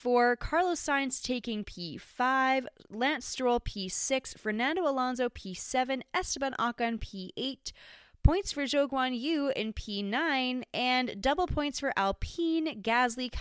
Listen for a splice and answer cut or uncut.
uncut